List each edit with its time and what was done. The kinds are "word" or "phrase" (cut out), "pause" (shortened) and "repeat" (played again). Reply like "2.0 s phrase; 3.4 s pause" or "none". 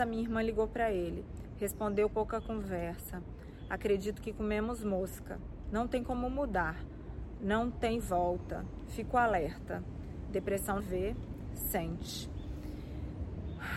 2.1 s word; 10.8 s phrase